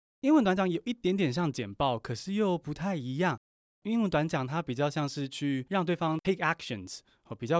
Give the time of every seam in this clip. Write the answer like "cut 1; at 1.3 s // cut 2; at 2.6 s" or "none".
none